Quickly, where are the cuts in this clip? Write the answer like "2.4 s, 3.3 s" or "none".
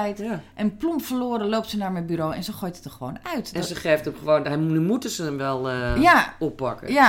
none

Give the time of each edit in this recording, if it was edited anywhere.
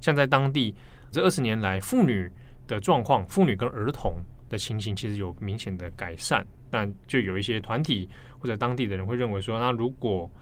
1.1 s

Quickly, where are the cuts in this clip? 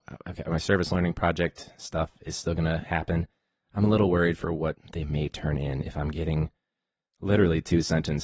none

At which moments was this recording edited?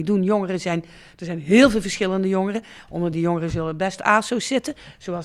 none

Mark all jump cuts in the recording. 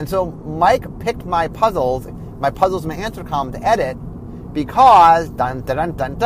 2.1 s

